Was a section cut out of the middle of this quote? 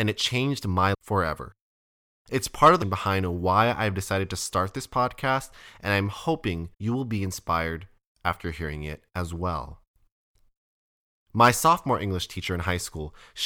yes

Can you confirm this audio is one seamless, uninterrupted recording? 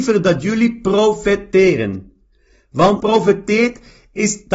no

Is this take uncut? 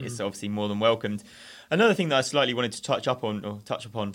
yes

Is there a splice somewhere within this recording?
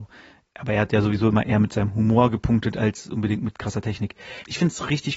no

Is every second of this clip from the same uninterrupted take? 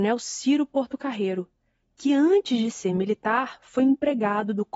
yes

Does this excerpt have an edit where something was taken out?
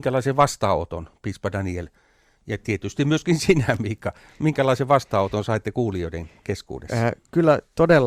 no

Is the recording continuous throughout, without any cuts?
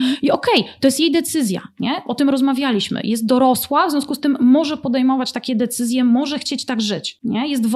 yes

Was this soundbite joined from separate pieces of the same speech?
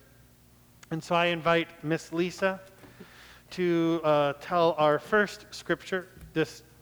no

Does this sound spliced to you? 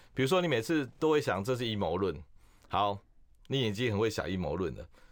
no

